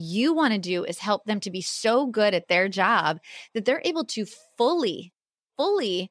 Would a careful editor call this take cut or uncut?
uncut